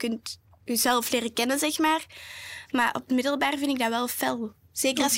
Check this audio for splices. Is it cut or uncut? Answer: uncut